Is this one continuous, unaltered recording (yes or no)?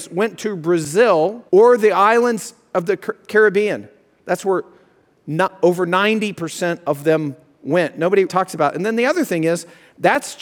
no